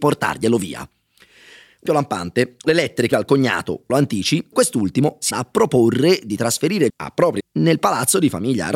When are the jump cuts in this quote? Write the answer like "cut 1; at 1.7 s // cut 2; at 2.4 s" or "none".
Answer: cut 1; at 1.8 s // cut 2; at 2.6 s // cut 3; at 3.1 s // cut 4; at 3.9 s // cut 5; at 4.5 s // cut 6; at 5.3 s // cut 7; at 6.9 s // cut 8; at 7.4 s